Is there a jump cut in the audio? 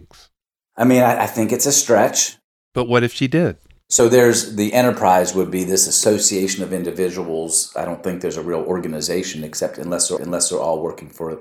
yes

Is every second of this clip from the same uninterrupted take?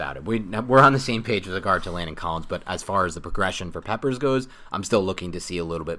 yes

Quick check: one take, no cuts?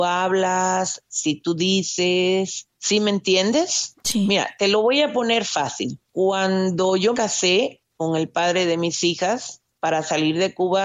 no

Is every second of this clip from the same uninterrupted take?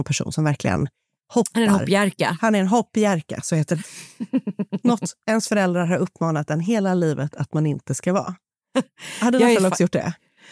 yes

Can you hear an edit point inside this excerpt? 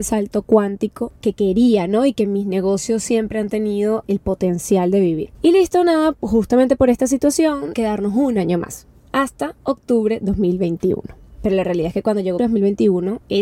yes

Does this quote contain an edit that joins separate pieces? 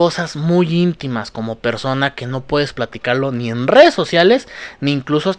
no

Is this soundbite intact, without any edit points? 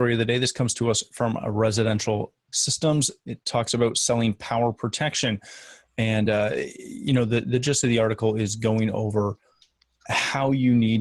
yes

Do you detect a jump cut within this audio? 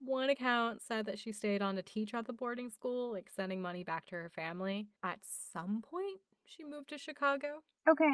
no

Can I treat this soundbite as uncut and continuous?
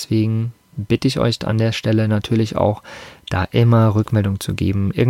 yes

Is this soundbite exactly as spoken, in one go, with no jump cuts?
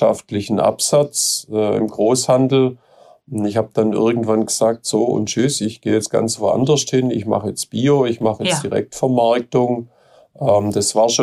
yes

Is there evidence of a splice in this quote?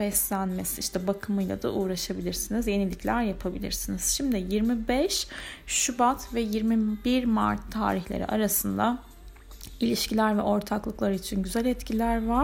no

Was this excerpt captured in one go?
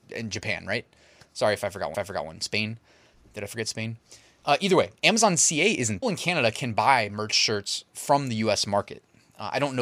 no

